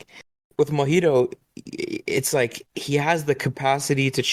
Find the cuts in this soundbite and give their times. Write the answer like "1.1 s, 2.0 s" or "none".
none